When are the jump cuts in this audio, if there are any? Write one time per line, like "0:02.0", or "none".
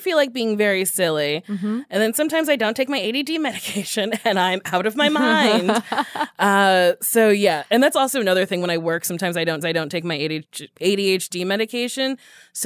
0:09.6

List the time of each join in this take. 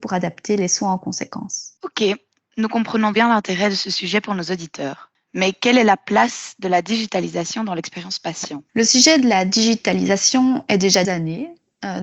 0:01.8
0:03.1
0:08.7
0:11.0

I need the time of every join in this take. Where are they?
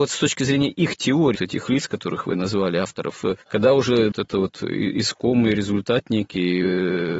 0:01.3
0:03.4
0:04.1

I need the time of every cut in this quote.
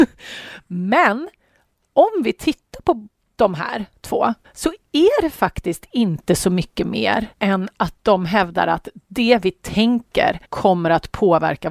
0:04.4
0:07.3
0:10.4

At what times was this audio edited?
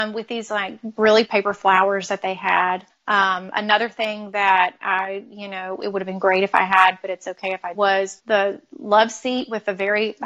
0:01.2
0:02.9
0:07.7
0:08.2

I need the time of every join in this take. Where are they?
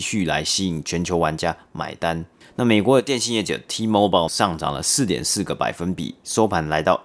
0:04.3

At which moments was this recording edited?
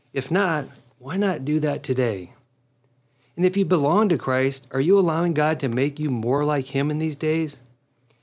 none

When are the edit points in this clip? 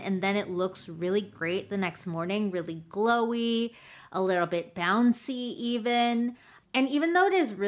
none

